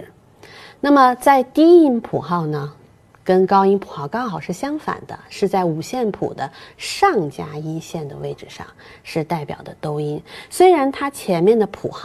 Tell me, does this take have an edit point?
no; 0 cuts

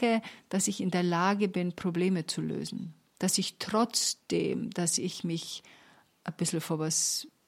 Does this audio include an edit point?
yes; 1 cut; at 3.0 s

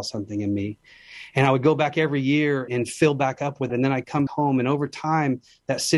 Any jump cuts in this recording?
yes; 3 cuts; at 2.7 s, 3.7 s, 4.3 s

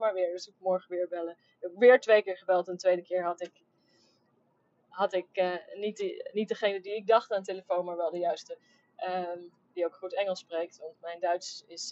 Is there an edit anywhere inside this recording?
no; 0 cuts

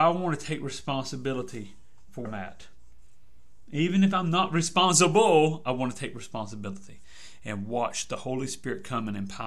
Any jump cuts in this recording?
yes; 1 cut; at 2.3 s

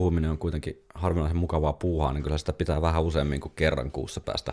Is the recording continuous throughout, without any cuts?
yes; 0 cuts

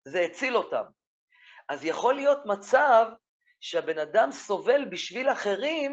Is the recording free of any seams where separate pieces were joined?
yes; 0 cuts

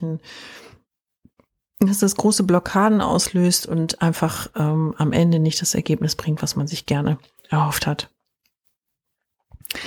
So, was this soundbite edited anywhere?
no; 0 cuts

